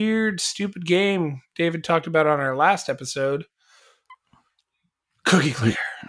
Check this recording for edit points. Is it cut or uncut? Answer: uncut